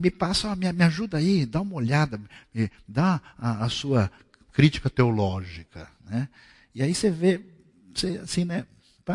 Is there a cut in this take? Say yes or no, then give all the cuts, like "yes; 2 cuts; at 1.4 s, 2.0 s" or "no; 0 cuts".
no; 0 cuts